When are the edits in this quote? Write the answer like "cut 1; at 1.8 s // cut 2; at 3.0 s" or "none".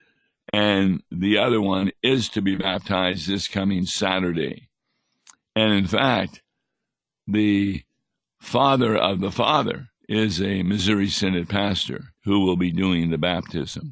cut 1; at 10.0 s // cut 2; at 12.1 s